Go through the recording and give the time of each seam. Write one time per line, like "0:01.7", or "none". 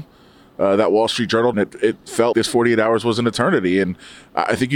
0:01.5
0:02.3